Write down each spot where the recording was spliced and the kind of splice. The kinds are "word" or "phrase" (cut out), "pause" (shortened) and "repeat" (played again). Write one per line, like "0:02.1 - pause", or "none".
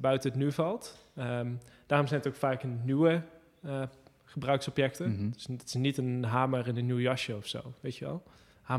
none